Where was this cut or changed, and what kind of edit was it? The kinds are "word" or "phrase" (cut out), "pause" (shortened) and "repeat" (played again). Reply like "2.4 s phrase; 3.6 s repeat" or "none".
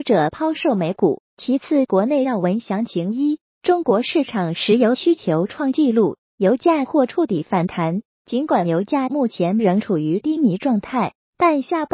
1.3 s pause